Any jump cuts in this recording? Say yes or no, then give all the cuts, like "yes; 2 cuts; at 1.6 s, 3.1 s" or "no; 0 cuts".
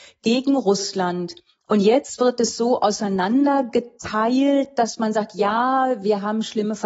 no; 0 cuts